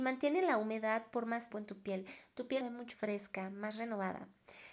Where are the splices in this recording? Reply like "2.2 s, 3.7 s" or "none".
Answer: 1.5 s, 2.6 s, 2.9 s